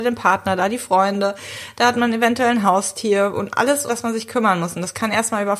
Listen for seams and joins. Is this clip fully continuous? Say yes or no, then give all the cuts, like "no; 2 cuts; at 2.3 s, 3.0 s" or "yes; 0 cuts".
no; 1 cut; at 3.9 s